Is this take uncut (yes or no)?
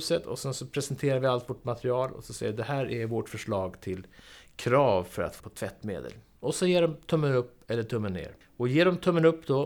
no